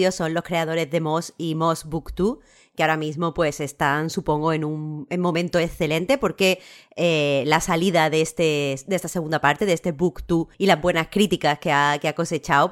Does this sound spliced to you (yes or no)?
yes